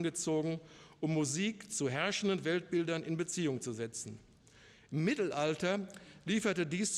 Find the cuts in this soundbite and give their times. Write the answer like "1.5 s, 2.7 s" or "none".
none